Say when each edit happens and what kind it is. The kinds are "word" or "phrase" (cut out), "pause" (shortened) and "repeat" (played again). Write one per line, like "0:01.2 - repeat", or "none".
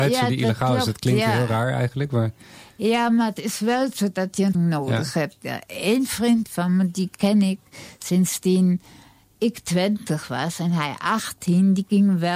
0:04.5 - word